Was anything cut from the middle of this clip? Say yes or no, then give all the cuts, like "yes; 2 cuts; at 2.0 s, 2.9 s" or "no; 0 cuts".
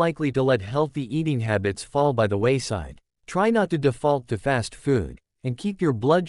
yes; 1 cut; at 3.2 s